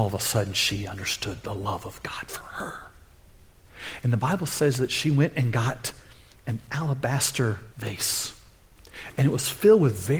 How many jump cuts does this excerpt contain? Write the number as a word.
one